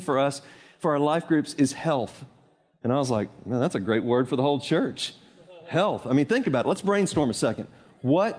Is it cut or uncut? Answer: uncut